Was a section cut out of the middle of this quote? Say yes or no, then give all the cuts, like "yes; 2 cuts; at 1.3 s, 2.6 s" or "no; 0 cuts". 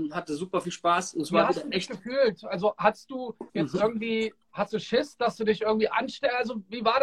yes; 1 cut; at 3.5 s